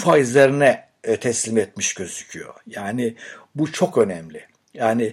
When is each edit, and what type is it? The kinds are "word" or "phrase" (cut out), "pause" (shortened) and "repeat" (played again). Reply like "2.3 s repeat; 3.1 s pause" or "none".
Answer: none